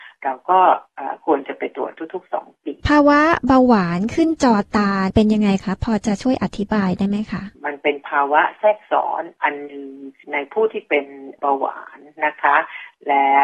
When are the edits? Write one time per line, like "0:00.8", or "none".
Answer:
0:02.8
0:07.5